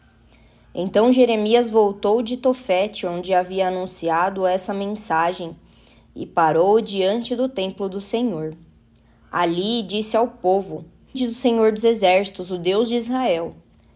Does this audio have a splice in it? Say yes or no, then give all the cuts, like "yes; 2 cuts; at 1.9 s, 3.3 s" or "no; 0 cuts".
yes; 1 cut; at 11.1 s